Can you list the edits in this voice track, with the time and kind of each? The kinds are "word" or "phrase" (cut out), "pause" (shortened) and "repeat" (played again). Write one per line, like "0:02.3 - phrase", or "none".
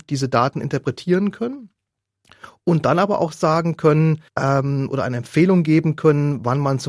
0:04.3 - pause